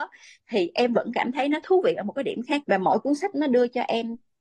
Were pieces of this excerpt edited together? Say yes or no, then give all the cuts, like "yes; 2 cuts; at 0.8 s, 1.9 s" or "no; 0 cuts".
yes; 1 cut; at 2.6 s